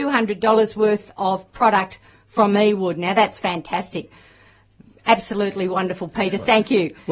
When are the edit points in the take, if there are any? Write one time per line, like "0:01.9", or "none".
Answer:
none